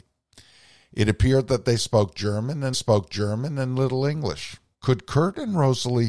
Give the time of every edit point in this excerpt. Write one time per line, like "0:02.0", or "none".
0:02.7
0:04.7

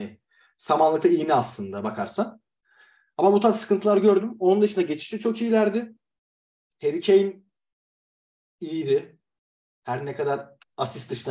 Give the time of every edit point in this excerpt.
none

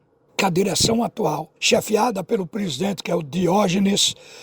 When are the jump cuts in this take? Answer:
0:01.6

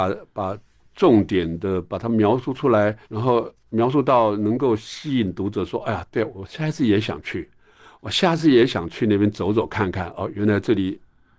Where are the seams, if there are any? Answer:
0:03.0

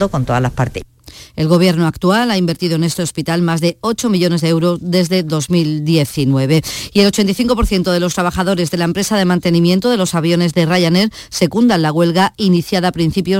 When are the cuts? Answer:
none

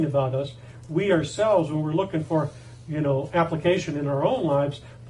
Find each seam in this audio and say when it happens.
none

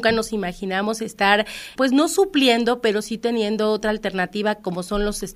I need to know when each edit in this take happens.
0:01.8

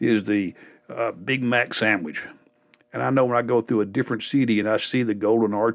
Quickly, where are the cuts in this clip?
none

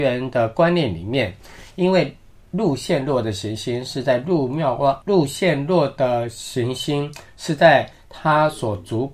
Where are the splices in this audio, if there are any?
0:05.0

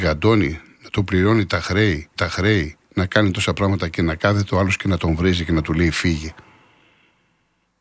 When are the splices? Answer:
0:02.2

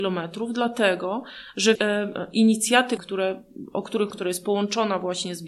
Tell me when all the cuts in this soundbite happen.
0:01.8
0:03.0
0:04.1

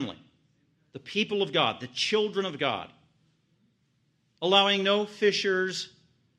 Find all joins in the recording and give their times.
none

